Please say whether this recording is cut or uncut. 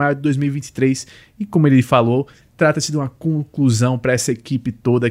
uncut